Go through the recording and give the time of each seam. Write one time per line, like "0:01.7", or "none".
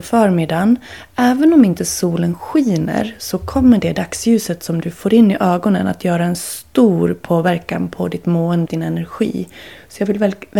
0:08.7